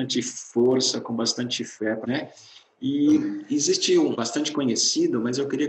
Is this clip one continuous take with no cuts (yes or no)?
no